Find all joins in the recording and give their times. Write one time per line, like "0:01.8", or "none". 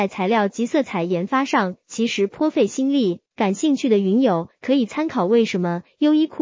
0:03.3